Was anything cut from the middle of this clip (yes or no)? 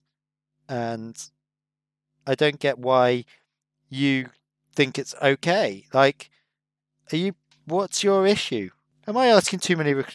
no